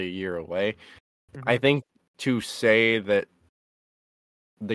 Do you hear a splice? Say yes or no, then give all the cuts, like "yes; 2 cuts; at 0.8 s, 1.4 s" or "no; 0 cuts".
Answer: no; 0 cuts